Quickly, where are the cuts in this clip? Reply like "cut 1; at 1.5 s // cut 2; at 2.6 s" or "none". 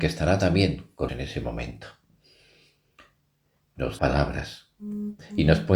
cut 1; at 1.1 s // cut 2; at 4.0 s